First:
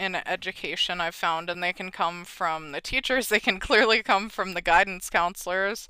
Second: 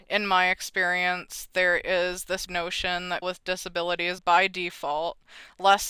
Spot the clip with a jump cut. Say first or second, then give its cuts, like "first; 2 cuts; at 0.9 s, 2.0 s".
second; 3 cuts; at 2.5 s, 3.2 s, 4.2 s